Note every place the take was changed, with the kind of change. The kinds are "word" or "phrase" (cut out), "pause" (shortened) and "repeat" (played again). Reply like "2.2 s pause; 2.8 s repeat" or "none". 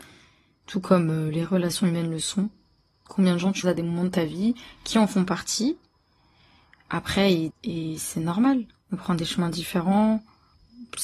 3.6 s word; 7.5 s word